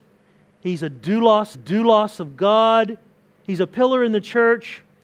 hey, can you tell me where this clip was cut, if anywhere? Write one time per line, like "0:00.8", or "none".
0:01.5
0:03.1